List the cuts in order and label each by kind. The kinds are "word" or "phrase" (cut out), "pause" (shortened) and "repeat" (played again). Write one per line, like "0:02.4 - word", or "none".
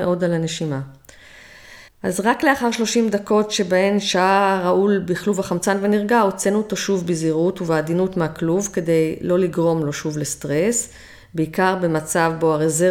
0:01.9 - pause